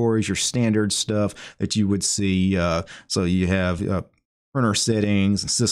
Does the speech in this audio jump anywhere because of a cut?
no; 0 cuts

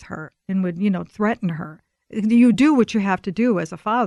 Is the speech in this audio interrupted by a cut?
no; 0 cuts

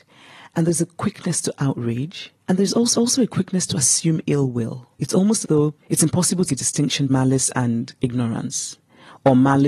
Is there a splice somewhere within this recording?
yes; 7 cuts; at 2.4 s, 2.9 s, 4.9 s, 5.4 s, 5.8 s, 6.5 s, 7.1 s

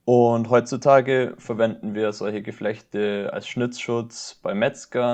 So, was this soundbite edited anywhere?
no; 0 cuts

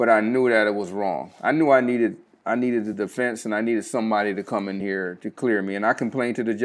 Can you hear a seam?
no; 0 cuts

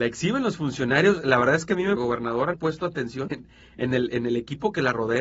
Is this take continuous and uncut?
no; 3 cuts; at 2.0 s, 2.5 s, 3.3 s

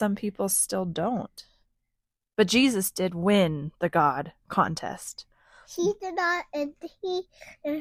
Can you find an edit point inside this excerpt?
no; 0 cuts

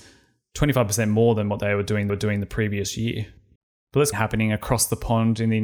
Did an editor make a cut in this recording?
yes; 3 cuts; at 2.1 s, 3.6 s, 4.1 s

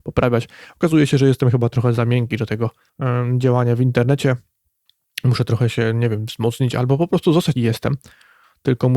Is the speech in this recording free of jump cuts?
no; 2 cuts; at 2.9 s, 7.5 s

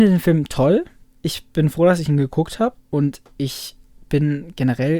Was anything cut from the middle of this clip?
no; 0 cuts

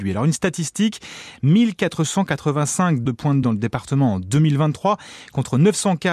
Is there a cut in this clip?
yes; 2 cuts; at 3.1 s, 3.4 s

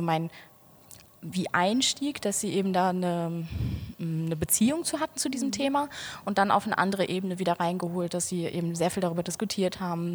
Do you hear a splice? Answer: yes; 1 cut; at 1.3 s

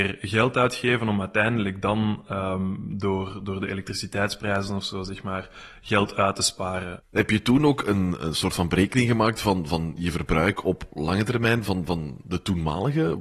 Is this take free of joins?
yes; 0 cuts

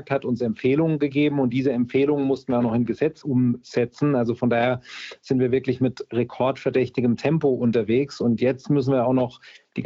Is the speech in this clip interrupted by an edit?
no; 0 cuts

